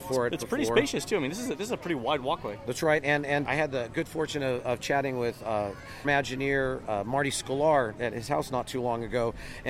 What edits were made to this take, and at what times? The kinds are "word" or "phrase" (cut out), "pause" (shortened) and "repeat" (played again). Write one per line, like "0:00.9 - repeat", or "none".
0:03.4 - word
0:06.0 - word

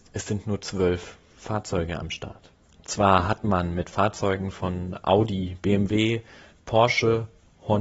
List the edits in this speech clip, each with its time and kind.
0:02.6 - pause

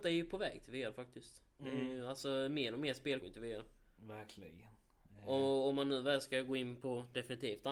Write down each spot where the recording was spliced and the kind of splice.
0:03.2 - word

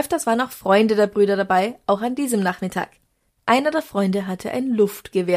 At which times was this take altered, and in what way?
none

